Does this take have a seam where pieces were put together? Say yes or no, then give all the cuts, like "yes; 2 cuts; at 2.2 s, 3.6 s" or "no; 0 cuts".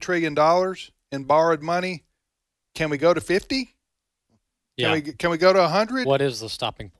no; 0 cuts